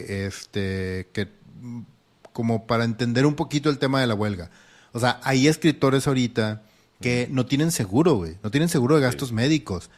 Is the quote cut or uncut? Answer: uncut